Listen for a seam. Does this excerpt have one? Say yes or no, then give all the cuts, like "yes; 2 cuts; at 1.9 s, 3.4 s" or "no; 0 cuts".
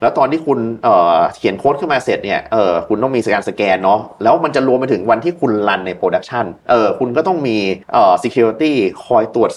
yes; 2 cuts; at 6.6 s, 7.8 s